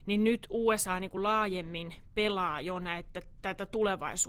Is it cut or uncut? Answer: uncut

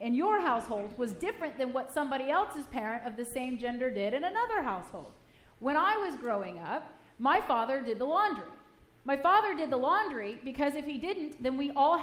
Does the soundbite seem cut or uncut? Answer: uncut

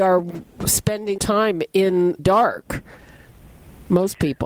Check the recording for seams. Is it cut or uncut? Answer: cut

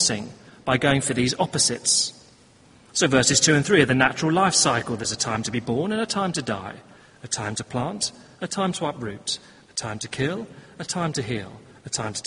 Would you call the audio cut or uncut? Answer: uncut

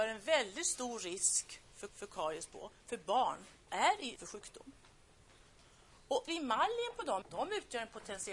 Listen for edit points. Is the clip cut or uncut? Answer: cut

